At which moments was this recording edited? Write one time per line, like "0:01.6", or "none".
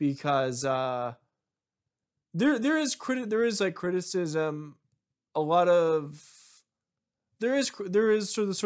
none